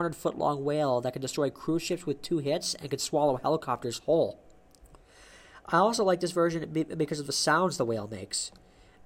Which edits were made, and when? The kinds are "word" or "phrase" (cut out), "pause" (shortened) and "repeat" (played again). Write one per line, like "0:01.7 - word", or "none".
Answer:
none

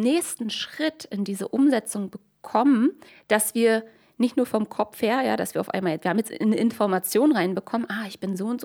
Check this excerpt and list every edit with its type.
0:03.1 - pause

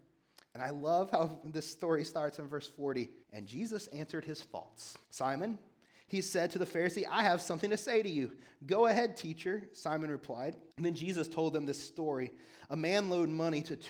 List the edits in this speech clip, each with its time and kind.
0:03.2 - pause
0:05.0 - pause
0:10.7 - pause

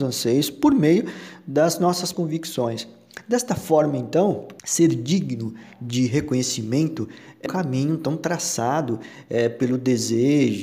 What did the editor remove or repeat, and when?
0:02.1 - word
0:04.6 - pause
0:07.5 - word

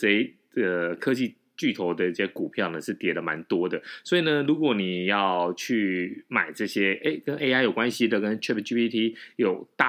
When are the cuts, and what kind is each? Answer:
none

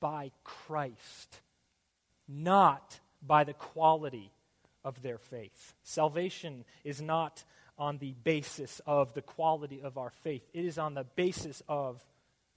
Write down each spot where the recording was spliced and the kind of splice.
none

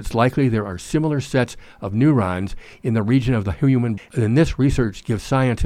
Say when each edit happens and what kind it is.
0:04.0 - word

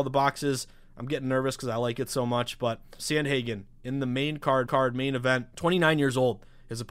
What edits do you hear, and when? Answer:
0:03.0 - word
0:04.7 - repeat
0:05.5 - pause

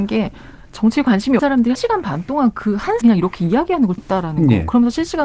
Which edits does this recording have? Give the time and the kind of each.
0:01.4 - word
0:01.7 - word
0:03.0 - word
0:04.0 - word

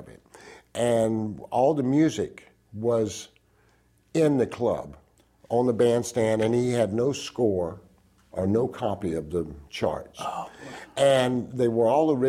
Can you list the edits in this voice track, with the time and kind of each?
none

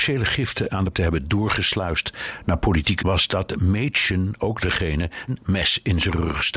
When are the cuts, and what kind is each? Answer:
0:00.9 - word
0:03.0 - word
0:05.3 - word

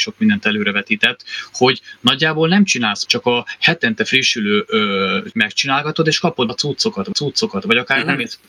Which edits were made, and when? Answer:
0:03.1 - word
0:05.3 - word
0:06.5 - word
0:07.1 - repeat

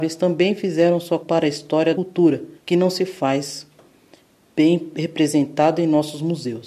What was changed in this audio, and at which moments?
0:01.2 - word
0:01.9 - phrase
0:02.6 - pause

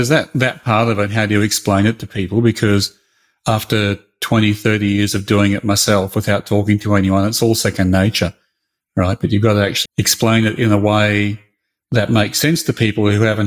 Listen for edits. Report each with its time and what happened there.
0:09.9 - word

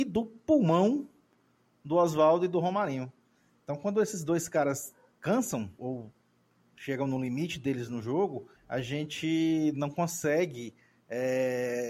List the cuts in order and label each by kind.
0:05.2 - word
0:05.8 - word
0:08.6 - pause

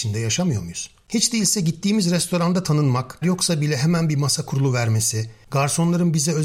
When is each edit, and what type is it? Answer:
0:03.2 - word

